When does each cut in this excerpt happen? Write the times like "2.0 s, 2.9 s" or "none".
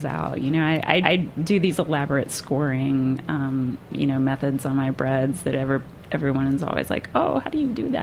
1.0 s